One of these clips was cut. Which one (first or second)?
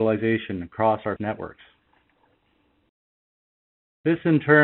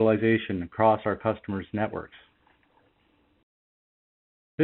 first